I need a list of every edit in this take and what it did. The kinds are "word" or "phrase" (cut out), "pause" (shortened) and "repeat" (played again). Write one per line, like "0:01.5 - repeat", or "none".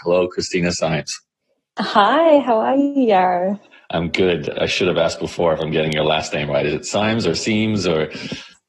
none

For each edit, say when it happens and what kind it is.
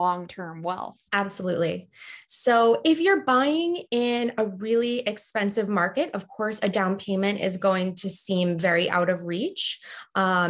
0:01.1 - pause

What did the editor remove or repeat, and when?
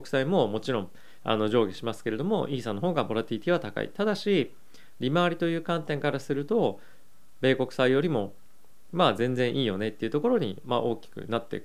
none

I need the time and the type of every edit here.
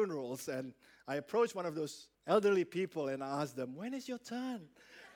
0:02.1 - pause

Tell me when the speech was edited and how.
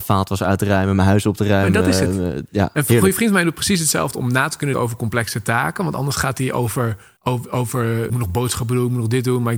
0:04.7 - word
0:07.2 - pause
0:08.1 - phrase

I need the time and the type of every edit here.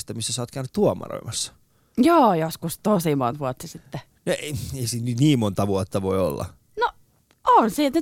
none

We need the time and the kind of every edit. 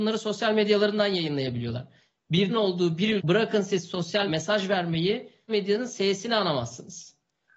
0:02.5 - word
0:03.2 - word
0:04.3 - word
0:05.5 - word

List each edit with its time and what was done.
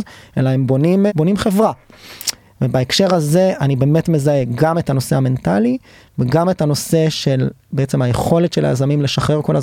0:01.1 - word

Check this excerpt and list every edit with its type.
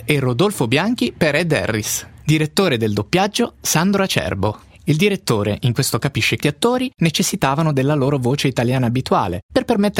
0:06.0 - word
0:06.4 - word

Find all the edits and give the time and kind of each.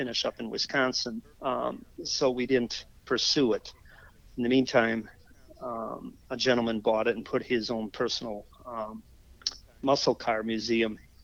0:01.3 - pause

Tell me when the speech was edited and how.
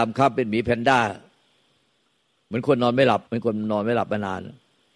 0:03.3 - pause

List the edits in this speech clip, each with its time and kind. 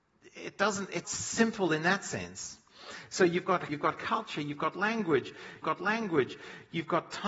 0:01.0 - word
0:03.7 - word
0:05.6 - repeat

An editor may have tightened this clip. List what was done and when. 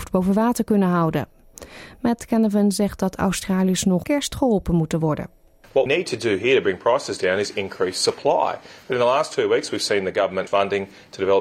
0:04.0 - word
0:05.9 - word
0:10.5 - word

